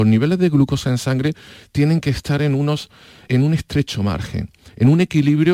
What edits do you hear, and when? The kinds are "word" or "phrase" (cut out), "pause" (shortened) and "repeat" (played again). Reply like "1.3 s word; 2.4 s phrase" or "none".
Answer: 3.3 s word